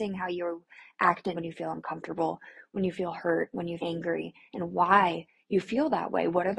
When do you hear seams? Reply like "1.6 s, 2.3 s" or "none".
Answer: 1.4 s, 3.8 s